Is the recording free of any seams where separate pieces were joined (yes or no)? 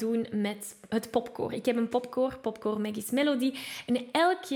yes